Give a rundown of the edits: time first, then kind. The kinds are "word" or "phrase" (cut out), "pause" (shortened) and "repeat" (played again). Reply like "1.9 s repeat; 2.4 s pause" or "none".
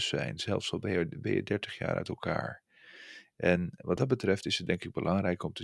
none